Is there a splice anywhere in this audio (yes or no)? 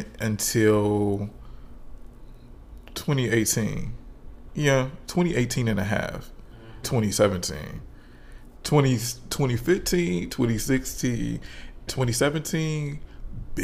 yes